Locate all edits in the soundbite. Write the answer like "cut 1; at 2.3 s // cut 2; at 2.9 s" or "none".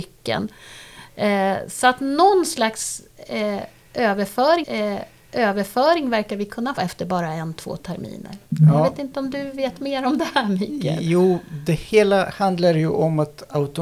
cut 1; at 4.6 s // cut 2; at 6.8 s